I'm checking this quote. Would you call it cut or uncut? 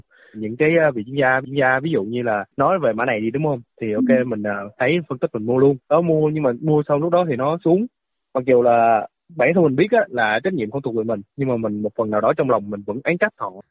cut